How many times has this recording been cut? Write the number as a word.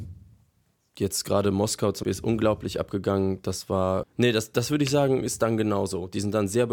two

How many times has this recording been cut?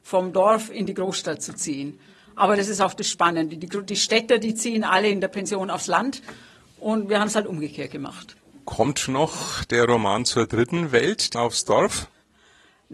one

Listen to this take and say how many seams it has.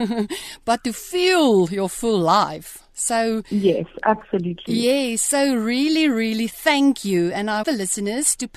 one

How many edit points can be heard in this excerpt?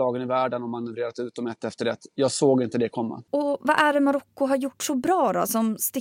one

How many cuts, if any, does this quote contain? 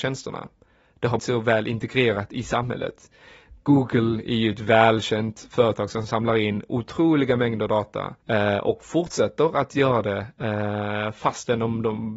two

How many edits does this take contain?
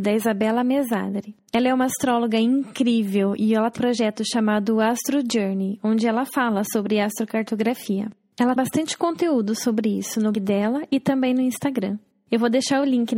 three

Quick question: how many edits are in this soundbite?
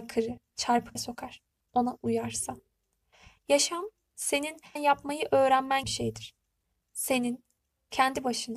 three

